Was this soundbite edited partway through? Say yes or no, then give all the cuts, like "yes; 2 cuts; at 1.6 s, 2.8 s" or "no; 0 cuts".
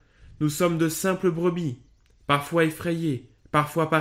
no; 0 cuts